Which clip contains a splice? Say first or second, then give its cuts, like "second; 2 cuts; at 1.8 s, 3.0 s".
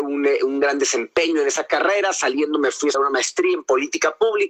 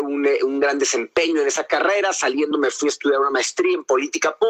first; 1 cut; at 2.9 s